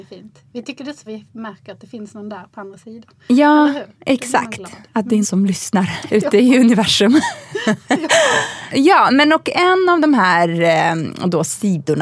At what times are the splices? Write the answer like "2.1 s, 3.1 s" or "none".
1.1 s, 3.2 s, 5.2 s

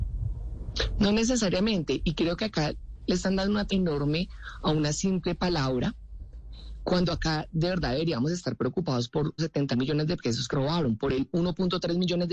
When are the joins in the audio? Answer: 3.7 s, 9.4 s, 9.7 s, 10.5 s

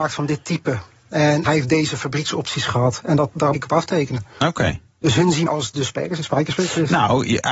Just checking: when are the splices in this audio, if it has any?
1.4 s, 3.5 s, 5.5 s

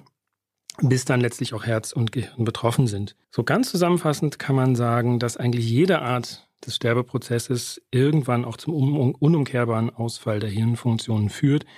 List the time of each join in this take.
3.2 s

